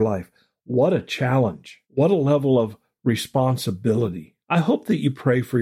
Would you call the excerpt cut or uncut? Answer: cut